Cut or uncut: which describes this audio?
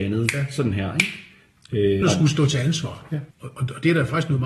cut